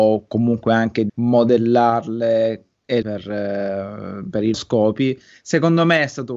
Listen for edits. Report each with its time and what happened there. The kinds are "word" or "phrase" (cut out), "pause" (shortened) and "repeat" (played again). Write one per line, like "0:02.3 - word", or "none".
0:01.1 - word
0:03.0 - word
0:04.5 - word